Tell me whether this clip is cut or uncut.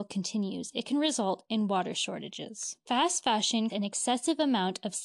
cut